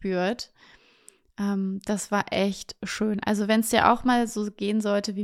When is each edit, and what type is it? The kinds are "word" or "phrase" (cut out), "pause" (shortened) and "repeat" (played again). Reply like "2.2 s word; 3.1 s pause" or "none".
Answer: none